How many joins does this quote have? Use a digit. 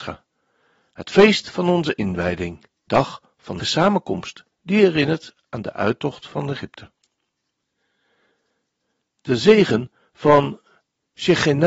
2